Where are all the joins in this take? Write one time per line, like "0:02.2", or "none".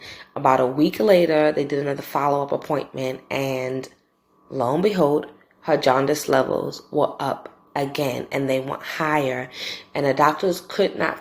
none